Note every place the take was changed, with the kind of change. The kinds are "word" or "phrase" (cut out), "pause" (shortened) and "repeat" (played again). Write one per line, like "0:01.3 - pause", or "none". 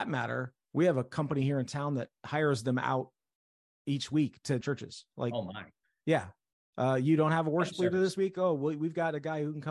0:04.6 - word